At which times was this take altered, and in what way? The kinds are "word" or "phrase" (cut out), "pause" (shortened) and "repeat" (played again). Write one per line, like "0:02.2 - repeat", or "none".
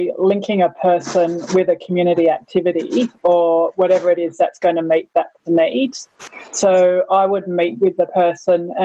0:05.5 - word